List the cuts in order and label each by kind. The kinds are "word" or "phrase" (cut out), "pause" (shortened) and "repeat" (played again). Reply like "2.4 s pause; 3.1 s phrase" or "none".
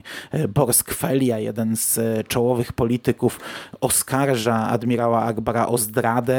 none